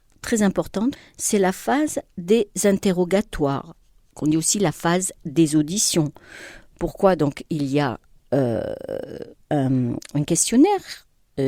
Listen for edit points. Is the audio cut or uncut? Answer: uncut